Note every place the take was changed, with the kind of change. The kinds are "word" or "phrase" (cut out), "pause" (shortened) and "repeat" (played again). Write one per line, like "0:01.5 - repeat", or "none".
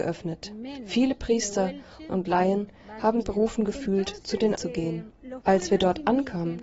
0:02.1 - word
0:03.2 - word
0:04.6 - word